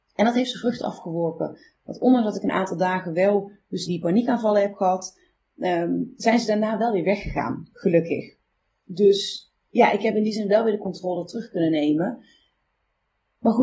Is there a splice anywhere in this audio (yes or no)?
yes